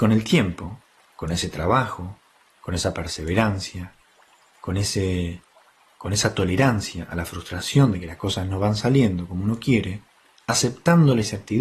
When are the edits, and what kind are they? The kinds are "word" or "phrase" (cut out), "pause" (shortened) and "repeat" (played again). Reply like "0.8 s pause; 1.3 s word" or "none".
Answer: none